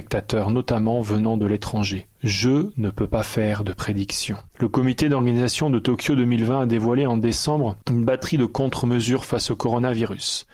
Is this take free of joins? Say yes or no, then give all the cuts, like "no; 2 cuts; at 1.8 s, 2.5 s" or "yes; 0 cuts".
no; 3 cuts; at 2.1 s, 4.5 s, 7.8 s